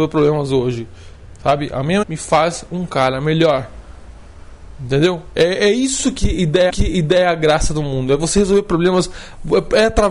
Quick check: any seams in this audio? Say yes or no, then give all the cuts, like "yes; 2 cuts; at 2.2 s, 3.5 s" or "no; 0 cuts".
yes; 2 cuts; at 2.0 s, 6.7 s